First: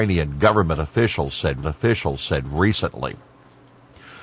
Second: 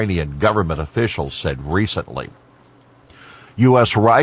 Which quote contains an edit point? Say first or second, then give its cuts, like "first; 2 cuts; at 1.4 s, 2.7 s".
first; 1 cut; at 1.6 s